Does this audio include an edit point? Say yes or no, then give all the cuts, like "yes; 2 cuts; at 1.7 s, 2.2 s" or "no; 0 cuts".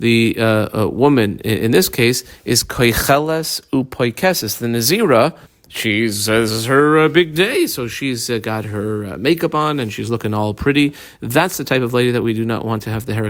yes; 1 cut; at 5.5 s